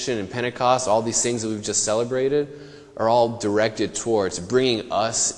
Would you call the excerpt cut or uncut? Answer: uncut